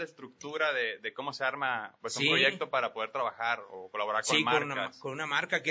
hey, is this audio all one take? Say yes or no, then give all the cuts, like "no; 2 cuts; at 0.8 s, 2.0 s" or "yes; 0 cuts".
yes; 0 cuts